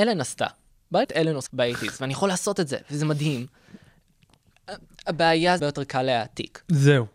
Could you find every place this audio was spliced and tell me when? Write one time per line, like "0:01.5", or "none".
0:01.0
0:01.5
0:05.6